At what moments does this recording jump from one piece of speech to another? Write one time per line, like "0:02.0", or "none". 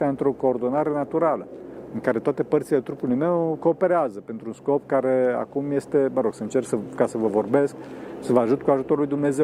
none